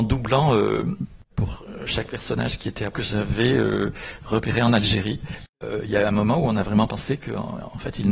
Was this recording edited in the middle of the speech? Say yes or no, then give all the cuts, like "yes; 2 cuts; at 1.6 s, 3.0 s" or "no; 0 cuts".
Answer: yes; 1 cut; at 2.9 s